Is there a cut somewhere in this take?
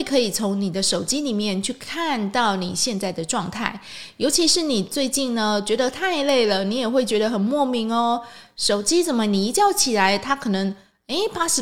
no; 0 cuts

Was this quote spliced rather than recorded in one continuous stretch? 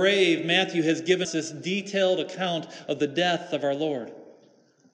yes; 1 cut; at 1.2 s

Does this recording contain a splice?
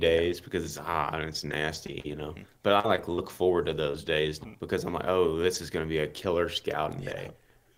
yes; 1 cut; at 4.4 s

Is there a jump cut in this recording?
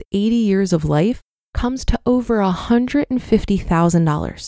no; 0 cuts

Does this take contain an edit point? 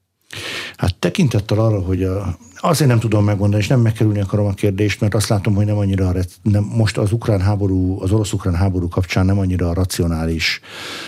no; 0 cuts

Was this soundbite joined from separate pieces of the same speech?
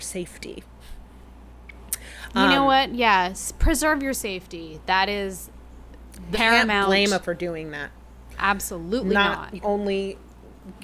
yes; 3 cuts; at 6.3 s, 7.2 s, 9.6 s

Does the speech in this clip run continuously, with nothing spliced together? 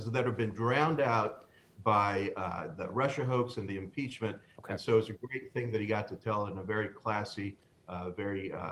yes; 0 cuts

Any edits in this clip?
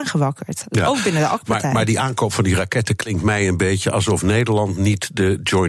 no; 0 cuts

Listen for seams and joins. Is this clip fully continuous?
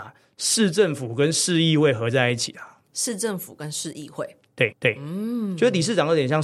no; 2 cuts; at 2.8 s, 4.7 s

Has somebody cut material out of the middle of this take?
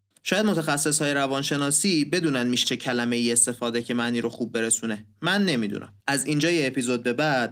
yes; 3 cuts; at 2.6 s, 3.8 s, 6.0 s

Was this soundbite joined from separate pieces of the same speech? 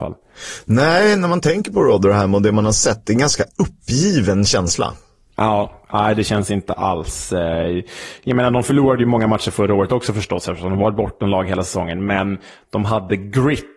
no; 0 cuts

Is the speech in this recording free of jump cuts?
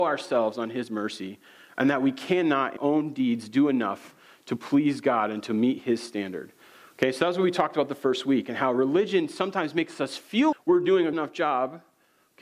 no; 3 cuts; at 2.8 s, 10.5 s, 11.1 s

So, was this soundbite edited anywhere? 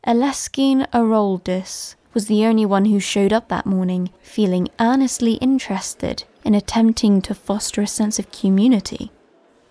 yes; 2 cuts; at 2.0 s, 4.2 s

